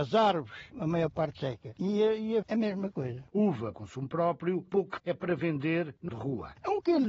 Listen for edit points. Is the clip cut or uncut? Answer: cut